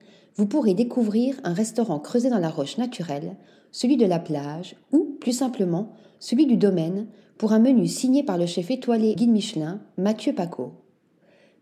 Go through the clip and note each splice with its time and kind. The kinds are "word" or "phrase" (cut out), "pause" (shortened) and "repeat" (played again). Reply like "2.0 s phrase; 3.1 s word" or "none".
9.2 s word